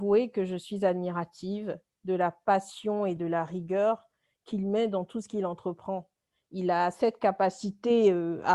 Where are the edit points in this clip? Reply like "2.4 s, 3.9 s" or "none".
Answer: none